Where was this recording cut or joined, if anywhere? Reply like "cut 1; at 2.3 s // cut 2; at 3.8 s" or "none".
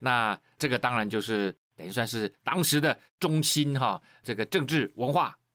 cut 1; at 1.6 s // cut 2; at 3.1 s